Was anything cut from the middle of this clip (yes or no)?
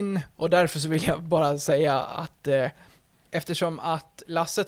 no